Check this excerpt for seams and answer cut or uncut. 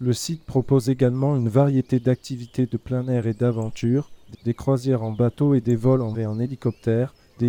cut